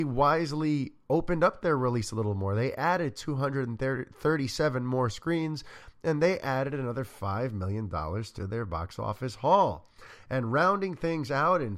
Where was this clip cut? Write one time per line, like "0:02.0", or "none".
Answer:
none